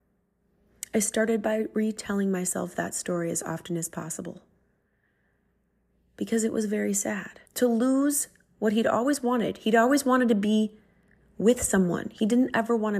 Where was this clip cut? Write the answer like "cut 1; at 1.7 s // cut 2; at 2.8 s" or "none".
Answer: cut 1; at 7.5 s